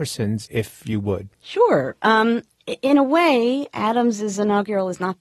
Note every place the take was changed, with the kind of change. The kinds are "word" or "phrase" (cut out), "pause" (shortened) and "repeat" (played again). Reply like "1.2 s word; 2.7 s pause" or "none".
1.3 s pause